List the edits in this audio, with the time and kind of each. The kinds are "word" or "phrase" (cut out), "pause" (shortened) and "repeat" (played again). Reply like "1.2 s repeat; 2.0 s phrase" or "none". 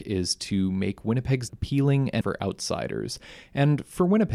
1.5 s word; 2.2 s word